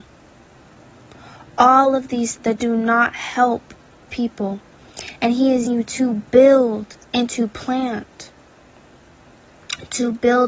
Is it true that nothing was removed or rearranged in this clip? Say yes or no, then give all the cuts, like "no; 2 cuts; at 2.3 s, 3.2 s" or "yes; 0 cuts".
no; 3 cuts; at 2.4 s, 4.1 s, 5.7 s